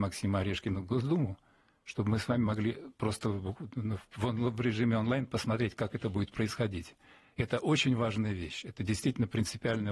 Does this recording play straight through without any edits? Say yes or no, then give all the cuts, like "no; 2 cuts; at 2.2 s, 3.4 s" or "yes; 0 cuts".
yes; 0 cuts